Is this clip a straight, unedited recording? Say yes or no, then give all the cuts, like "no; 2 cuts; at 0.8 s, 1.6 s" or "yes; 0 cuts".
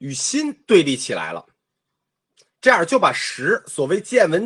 yes; 0 cuts